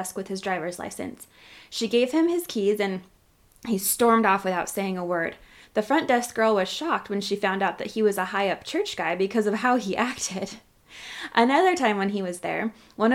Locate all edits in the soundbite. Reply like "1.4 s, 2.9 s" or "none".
none